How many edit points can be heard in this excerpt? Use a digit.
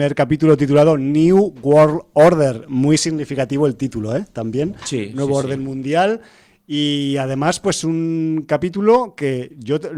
0